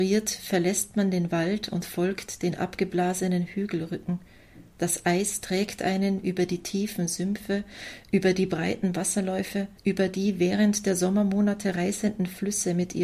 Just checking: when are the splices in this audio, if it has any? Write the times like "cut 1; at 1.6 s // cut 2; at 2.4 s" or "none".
cut 1; at 4.7 s // cut 2; at 9.8 s